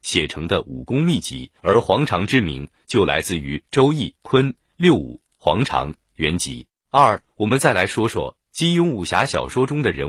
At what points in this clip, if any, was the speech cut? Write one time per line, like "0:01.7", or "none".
0:01.6
0:04.2
0:06.8